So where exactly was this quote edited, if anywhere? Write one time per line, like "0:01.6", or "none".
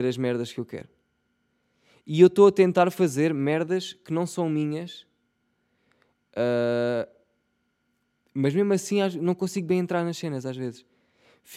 none